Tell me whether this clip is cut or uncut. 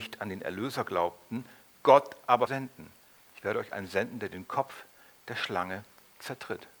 cut